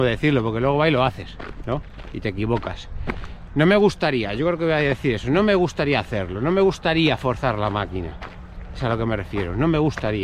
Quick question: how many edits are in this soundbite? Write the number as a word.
zero